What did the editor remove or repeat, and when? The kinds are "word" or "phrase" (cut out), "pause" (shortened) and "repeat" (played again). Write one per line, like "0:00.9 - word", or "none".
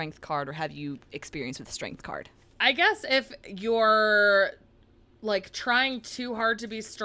none